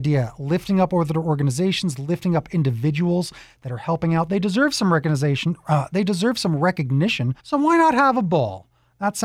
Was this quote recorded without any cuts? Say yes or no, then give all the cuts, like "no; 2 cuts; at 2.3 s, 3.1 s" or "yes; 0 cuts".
no; 1 cut; at 7.4 s